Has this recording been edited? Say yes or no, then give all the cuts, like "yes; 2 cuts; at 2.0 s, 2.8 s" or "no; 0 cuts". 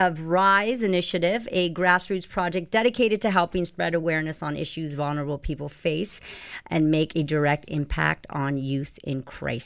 no; 0 cuts